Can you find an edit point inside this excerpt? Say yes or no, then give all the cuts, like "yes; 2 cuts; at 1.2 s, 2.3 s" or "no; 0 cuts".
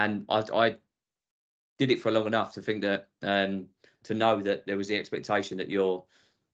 no; 0 cuts